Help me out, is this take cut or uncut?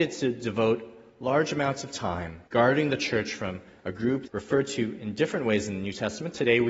cut